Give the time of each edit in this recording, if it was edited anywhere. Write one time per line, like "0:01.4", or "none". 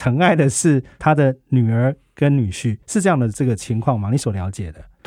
0:02.8